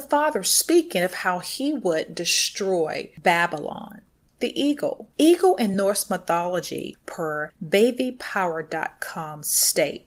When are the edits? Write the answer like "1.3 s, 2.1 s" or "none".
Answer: none